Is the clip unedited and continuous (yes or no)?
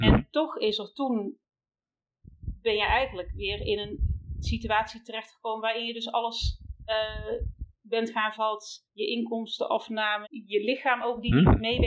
no